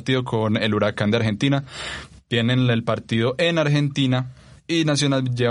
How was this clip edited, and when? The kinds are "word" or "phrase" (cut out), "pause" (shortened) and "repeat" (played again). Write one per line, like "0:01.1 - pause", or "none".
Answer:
none